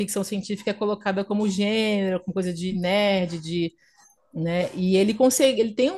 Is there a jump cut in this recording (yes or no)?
no